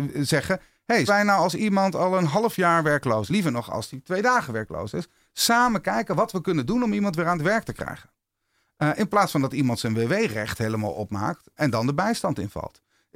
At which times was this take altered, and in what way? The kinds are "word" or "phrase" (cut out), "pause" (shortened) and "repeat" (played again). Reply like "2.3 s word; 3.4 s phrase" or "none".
1.1 s word; 3.3 s word; 11.6 s word